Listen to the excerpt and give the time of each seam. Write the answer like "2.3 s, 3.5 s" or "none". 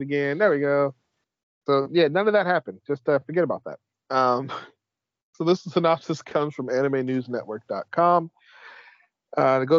none